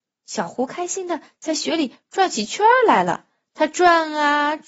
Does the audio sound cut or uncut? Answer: uncut